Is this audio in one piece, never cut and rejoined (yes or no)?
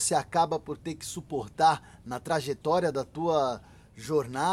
yes